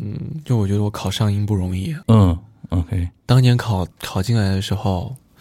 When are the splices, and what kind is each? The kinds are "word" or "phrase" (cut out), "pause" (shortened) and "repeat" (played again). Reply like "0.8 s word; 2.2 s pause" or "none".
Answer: 2.0 s pause; 3.9 s pause